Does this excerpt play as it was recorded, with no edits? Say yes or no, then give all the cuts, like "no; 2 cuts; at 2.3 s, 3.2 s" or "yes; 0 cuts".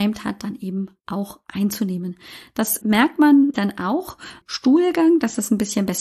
no; 3 cuts; at 2.8 s, 3.5 s, 4.4 s